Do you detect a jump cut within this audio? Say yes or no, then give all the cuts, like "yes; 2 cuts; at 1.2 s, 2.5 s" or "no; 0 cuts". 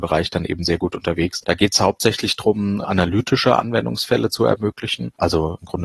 no; 0 cuts